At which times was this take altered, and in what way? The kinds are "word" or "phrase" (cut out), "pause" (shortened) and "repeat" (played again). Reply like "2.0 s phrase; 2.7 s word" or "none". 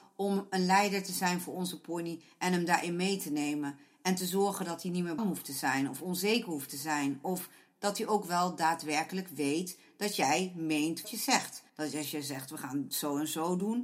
5.2 s word; 11.0 s word; 11.7 s pause